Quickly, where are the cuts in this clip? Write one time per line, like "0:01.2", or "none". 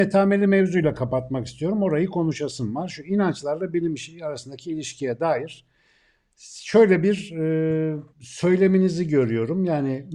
0:08.1